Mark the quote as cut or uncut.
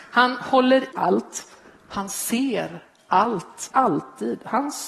cut